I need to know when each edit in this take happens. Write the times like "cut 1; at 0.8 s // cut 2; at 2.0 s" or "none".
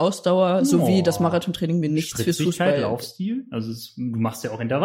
none